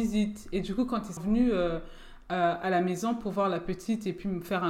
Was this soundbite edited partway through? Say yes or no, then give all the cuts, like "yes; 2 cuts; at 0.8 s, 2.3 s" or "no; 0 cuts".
yes; 1 cut; at 1.2 s